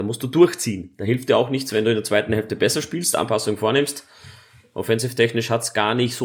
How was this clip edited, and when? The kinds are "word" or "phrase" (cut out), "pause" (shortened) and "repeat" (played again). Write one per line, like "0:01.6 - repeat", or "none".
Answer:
none